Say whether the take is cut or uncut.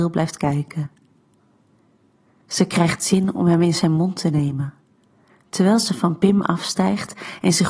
uncut